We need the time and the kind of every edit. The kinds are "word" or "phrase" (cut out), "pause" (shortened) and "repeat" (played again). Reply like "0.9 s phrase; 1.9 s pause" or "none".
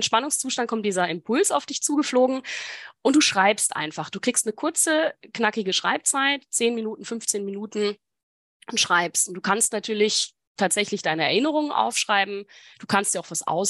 none